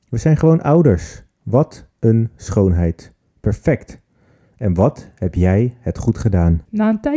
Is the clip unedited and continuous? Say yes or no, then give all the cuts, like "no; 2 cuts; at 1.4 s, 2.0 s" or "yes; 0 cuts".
yes; 0 cuts